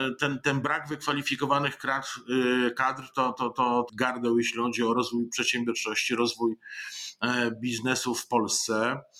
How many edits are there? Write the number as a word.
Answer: one